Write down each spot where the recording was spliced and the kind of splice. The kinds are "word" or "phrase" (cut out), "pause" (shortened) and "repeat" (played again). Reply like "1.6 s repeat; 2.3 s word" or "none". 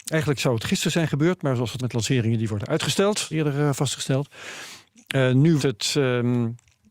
1.8 s word; 3.3 s phrase; 5.6 s word